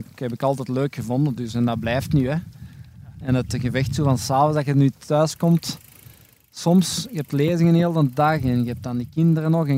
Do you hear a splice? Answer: no; 0 cuts

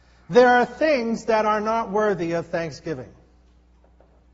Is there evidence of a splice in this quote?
no; 0 cuts

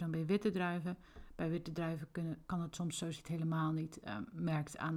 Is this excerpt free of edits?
no; 1 cut; at 3.1 s

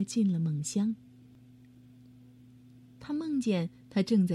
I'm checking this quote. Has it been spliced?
no; 0 cuts

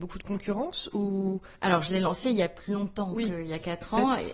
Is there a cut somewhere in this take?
no; 0 cuts

